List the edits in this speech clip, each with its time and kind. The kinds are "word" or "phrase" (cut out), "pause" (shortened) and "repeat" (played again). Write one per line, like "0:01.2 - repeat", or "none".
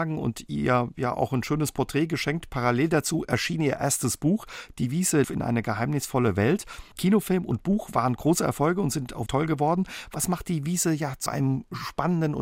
0:05.2 - word
0:09.3 - word
0:11.3 - word